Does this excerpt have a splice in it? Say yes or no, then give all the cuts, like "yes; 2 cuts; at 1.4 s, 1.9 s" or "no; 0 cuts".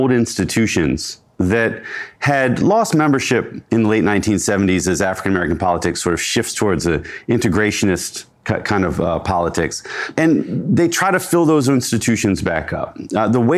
yes; 1 cut; at 8.3 s